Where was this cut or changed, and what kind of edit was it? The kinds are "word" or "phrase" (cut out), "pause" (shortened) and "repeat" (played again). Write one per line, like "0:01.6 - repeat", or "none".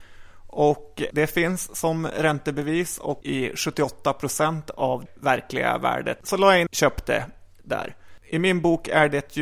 0:01.1 - word
0:03.2 - word
0:05.1 - word
0:06.7 - phrase